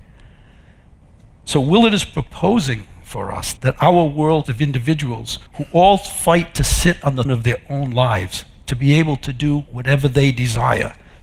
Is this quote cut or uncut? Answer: cut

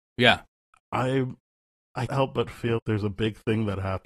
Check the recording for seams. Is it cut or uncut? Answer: cut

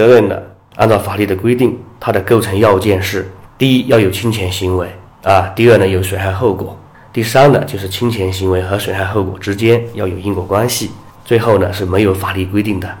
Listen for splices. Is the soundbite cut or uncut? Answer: uncut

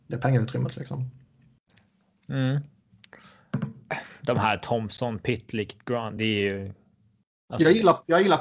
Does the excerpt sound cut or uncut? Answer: uncut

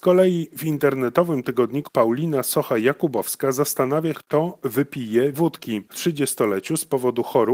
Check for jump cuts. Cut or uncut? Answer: cut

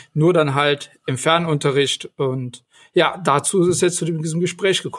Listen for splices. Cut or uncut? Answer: uncut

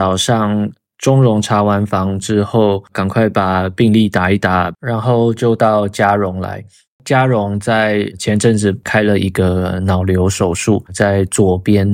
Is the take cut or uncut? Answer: uncut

